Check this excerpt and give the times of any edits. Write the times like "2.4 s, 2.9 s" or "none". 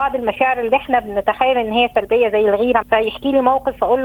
2.8 s